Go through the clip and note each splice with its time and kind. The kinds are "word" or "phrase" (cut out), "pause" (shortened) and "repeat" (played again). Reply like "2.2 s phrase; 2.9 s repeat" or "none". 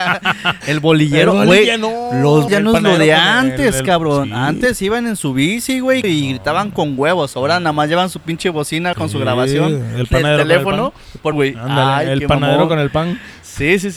2.5 s word; 6.0 s word; 8.9 s word; 11.3 s word

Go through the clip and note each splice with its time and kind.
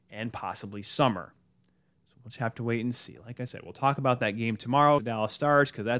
5.0 s word

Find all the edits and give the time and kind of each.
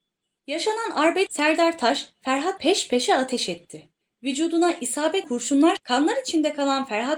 1.3 s word; 2.6 s word; 5.2 s word; 5.8 s word

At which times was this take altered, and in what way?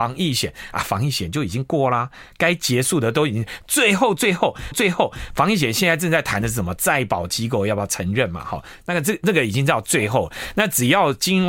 4.7 s repeat

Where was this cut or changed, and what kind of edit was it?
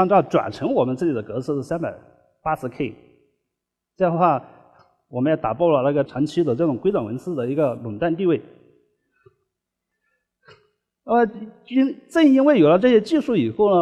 6.1 s word

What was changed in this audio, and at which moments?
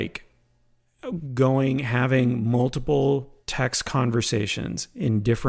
3.4 s pause

